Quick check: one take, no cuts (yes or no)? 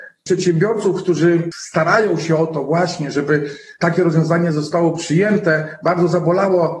yes